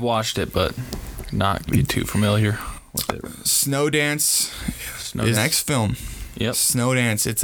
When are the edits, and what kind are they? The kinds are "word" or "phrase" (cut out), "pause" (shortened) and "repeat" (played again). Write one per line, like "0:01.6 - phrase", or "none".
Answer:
0:01.7 - word
0:03.2 - word
0:05.3 - word